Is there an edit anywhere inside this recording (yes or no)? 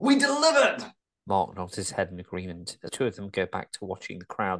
yes